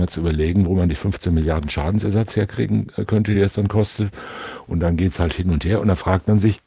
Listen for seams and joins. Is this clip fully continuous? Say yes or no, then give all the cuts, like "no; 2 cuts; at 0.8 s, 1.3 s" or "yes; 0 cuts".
yes; 0 cuts